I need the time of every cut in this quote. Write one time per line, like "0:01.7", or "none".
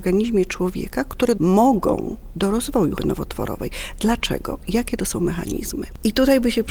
0:01.4
0:02.3
0:03.0